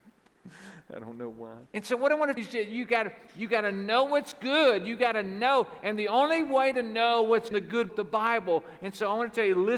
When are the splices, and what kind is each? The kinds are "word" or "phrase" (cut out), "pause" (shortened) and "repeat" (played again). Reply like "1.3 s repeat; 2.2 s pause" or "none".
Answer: 1.7 s pause; 2.4 s word; 7.5 s phrase; 7.9 s word